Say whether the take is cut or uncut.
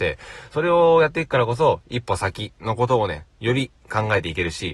cut